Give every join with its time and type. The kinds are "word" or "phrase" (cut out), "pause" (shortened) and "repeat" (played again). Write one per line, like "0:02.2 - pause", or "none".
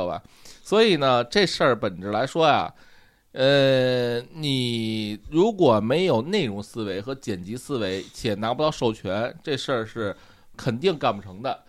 0:10.5 - word